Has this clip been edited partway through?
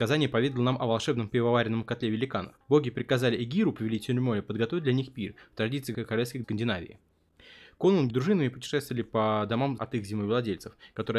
yes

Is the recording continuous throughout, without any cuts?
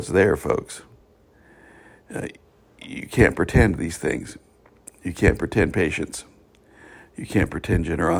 yes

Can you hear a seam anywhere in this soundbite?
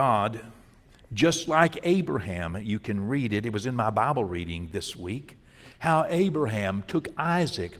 no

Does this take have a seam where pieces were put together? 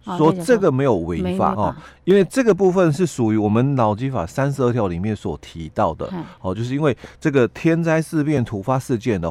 yes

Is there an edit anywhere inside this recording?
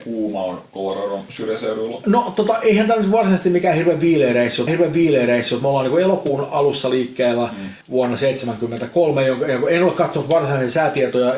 yes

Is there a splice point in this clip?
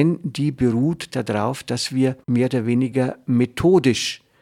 yes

